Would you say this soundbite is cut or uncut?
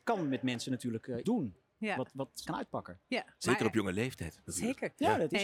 cut